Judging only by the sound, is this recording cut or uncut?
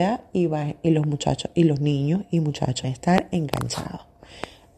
cut